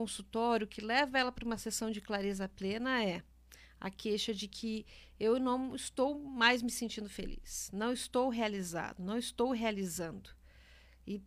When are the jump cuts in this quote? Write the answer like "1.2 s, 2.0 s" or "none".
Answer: none